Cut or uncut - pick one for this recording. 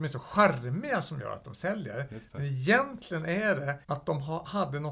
cut